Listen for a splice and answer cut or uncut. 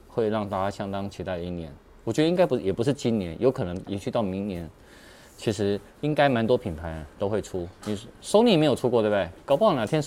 uncut